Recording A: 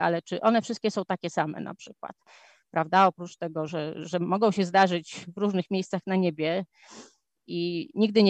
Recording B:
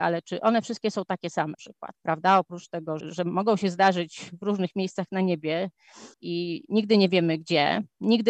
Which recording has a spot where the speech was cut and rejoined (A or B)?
B